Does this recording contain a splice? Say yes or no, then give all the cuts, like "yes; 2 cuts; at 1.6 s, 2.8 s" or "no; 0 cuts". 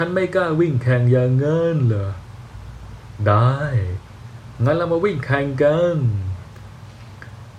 no; 0 cuts